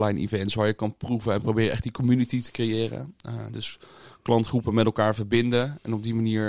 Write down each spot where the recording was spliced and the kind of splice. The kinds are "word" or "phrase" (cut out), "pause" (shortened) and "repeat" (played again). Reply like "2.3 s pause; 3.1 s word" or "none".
none